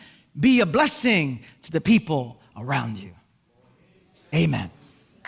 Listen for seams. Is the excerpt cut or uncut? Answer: uncut